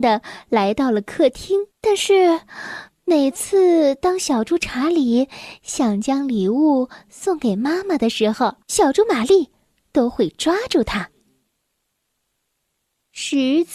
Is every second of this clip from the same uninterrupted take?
no; 2 cuts; at 1.7 s, 8.6 s

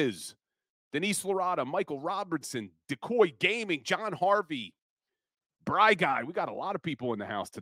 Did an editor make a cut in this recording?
no; 0 cuts

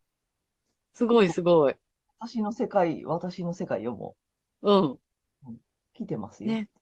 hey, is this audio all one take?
yes; 0 cuts

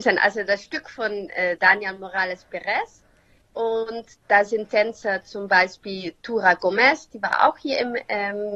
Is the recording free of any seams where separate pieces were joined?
yes; 0 cuts

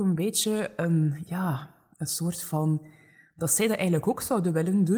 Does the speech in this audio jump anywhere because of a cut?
no; 0 cuts

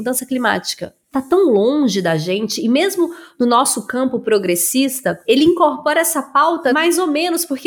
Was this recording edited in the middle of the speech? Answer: no; 0 cuts

